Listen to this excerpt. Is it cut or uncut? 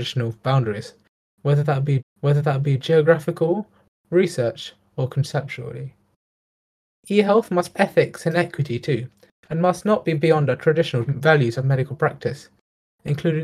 cut